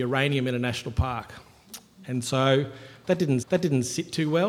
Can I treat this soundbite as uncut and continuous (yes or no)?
no